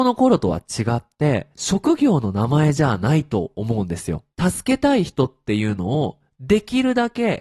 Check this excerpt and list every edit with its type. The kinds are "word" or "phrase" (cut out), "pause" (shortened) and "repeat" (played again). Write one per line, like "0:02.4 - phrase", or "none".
0:01.5 - pause
0:04.3 - pause

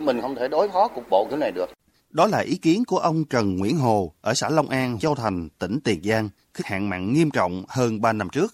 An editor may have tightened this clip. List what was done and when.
0:05.0 - word
0:06.6 - phrase

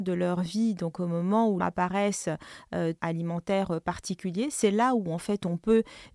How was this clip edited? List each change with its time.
0:01.6 - phrase
0:03.0 - phrase

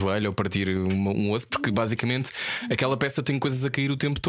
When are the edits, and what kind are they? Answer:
none

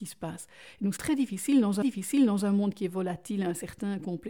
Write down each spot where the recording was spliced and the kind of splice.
0:01.0 - word
0:01.8 - repeat

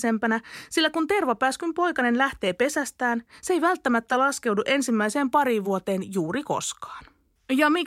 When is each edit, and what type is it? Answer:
none

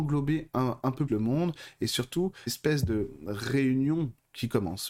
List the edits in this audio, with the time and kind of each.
0:01.1 - word
0:02.5 - phrase

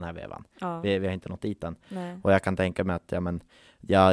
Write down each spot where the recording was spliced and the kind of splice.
none

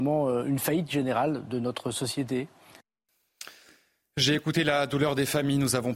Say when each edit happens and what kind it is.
none

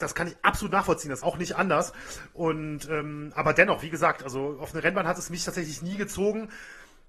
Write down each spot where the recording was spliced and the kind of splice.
0:01.2 - phrase

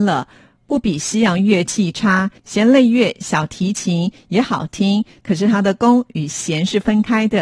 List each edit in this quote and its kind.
0:02.4 - pause

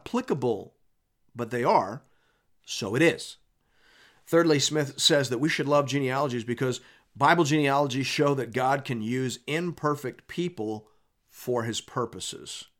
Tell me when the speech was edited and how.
none

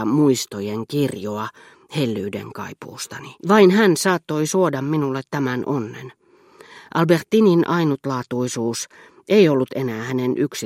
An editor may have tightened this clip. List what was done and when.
0:03.4 - pause

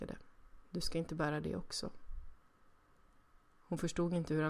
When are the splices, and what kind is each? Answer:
none

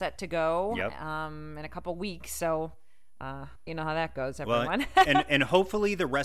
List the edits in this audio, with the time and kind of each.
0:03.7 - phrase

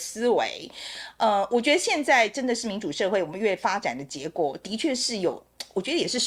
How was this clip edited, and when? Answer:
none

